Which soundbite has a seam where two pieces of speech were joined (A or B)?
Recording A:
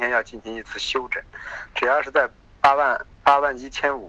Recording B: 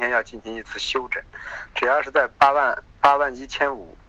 B